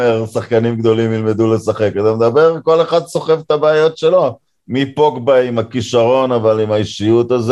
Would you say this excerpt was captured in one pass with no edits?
yes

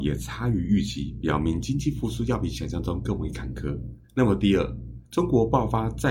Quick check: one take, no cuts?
no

